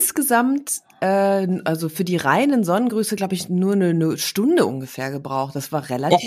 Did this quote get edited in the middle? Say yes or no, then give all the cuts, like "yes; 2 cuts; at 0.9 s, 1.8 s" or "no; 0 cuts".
no; 0 cuts